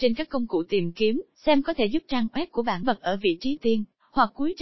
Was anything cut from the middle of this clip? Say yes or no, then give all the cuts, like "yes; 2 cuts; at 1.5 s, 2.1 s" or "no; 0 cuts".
yes; 3 cuts; at 1.3 s, 2.8 s, 3.6 s